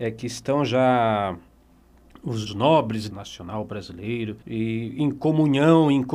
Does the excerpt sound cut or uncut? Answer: cut